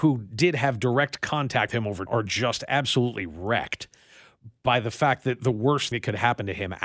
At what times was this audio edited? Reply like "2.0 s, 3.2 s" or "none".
1.7 s, 2.1 s, 5.9 s